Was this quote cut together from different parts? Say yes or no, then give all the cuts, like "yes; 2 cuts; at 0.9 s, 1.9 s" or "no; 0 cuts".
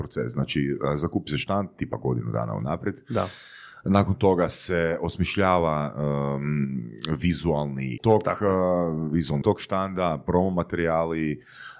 yes; 2 cuts; at 8.0 s, 9.4 s